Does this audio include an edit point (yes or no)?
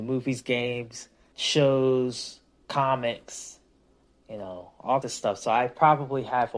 yes